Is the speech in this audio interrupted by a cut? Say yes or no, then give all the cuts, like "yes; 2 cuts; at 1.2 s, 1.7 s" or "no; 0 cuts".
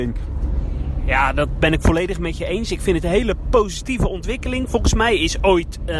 no; 0 cuts